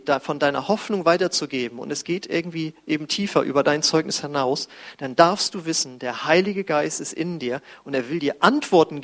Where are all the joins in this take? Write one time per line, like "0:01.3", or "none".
none